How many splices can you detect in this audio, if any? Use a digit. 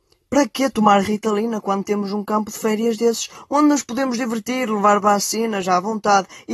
0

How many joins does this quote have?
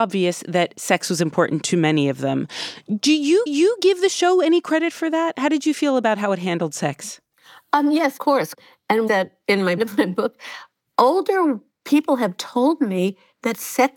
4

